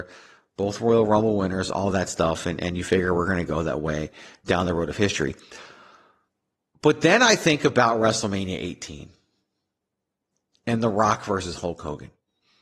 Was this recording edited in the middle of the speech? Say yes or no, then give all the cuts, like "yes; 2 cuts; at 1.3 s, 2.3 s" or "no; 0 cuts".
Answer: no; 0 cuts